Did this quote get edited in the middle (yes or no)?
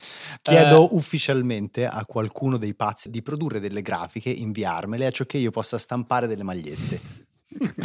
yes